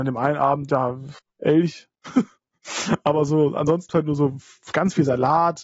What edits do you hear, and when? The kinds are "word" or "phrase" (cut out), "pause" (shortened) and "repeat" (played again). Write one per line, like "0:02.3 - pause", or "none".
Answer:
0:01.2 - pause
0:03.9 - word

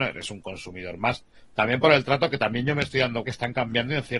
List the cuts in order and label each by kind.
0:03.2 - word

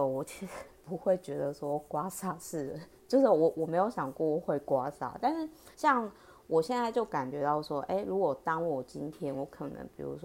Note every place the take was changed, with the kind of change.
0:05.7 - pause

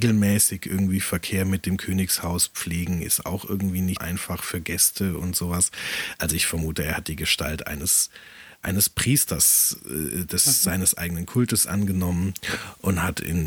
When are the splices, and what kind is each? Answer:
0:04.0 - word

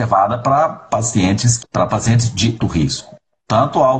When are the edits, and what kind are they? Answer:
0:01.6 - word
0:02.6 - word

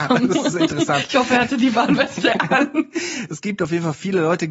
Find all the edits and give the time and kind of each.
none

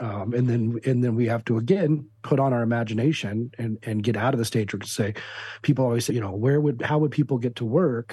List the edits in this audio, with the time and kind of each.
0:06.1 - word

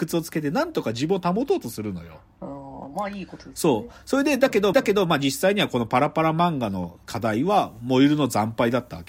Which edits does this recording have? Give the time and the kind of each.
0:04.7 - repeat
0:07.0 - pause

